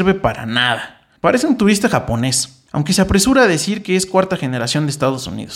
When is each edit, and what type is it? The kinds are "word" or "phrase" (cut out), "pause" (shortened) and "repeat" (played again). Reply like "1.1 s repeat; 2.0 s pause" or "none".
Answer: 1.2 s pause; 2.7 s pause